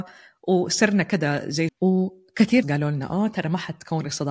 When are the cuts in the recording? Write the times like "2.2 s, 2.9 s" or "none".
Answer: 1.7 s, 2.6 s